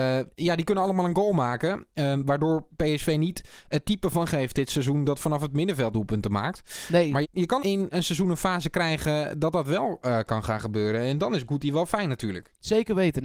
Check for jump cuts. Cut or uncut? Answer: cut